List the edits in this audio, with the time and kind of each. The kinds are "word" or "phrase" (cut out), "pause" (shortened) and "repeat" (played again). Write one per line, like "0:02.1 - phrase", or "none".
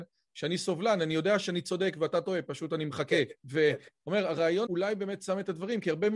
0:03.4 - pause
0:04.7 - word